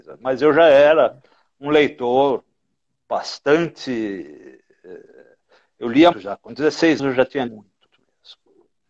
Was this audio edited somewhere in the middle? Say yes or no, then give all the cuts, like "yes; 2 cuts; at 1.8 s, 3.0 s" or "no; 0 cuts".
yes; 4 cuts; at 6.1 s, 7.0 s, 7.5 s, 7.9 s